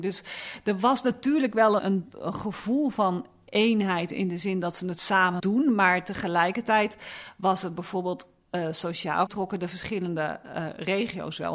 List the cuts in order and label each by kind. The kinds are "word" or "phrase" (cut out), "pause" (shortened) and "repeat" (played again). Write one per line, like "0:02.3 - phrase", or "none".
0:01.8 - word
0:05.4 - word
0:09.3 - word